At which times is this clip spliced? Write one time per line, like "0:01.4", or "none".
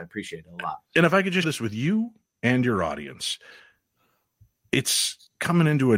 0:01.4